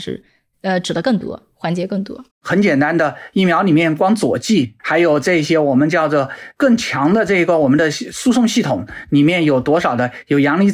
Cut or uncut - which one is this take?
cut